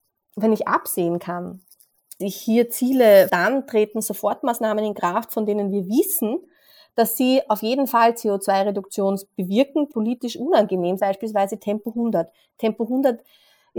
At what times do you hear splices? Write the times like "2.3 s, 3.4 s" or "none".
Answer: 2.2 s, 3.3 s, 9.9 s, 11.0 s

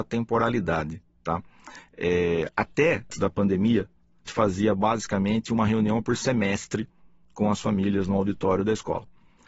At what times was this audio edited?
3.1 s, 4.3 s

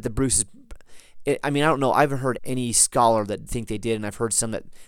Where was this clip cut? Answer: 2.4 s, 3.5 s

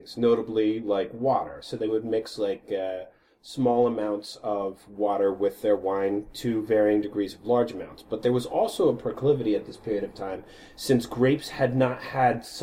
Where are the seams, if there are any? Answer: none

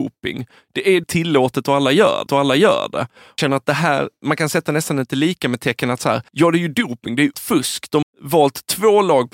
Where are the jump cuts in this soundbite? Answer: 1.0 s, 2.3 s, 3.4 s, 6.3 s, 7.3 s, 8.0 s

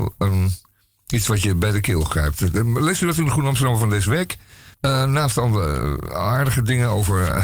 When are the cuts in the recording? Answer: 4.7 s

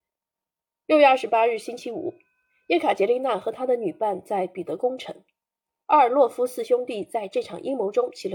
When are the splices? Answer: none

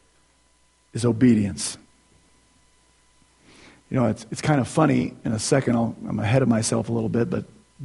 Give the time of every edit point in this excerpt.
none

